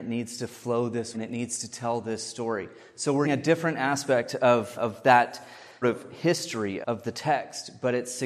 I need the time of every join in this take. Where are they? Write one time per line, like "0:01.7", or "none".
0:01.1
0:03.2
0:04.7
0:05.8
0:06.8